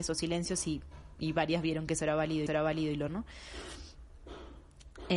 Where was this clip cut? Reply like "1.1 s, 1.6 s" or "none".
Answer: 2.5 s, 3.1 s